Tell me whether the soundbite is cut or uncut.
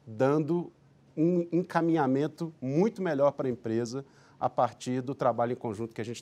uncut